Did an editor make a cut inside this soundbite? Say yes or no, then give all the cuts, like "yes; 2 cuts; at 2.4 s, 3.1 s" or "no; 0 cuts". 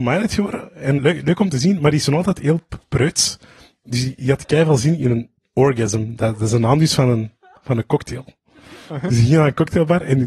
yes; 1 cut; at 1.0 s